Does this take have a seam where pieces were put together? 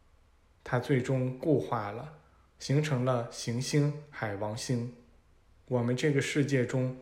no; 0 cuts

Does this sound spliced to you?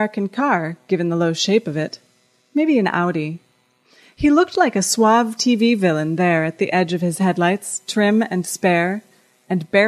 no; 0 cuts

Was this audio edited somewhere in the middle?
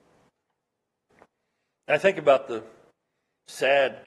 no; 0 cuts

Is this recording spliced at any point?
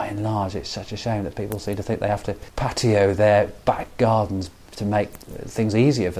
no; 0 cuts

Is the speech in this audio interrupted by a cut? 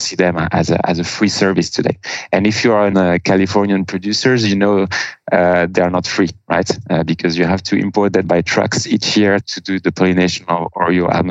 yes; 3 cuts; at 2.9 s, 8.2 s, 9.4 s

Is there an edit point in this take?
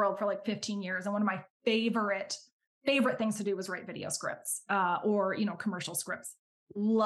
no; 0 cuts

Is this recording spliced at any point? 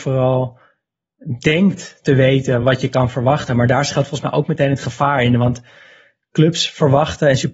no; 0 cuts

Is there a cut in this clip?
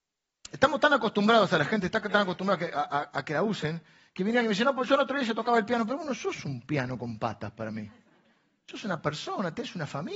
no; 0 cuts

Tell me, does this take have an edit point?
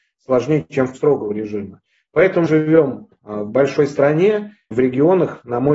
yes; 3 cuts; at 0.9 s, 2.5 s, 4.7 s

